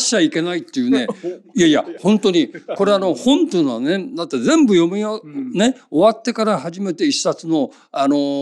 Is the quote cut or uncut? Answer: uncut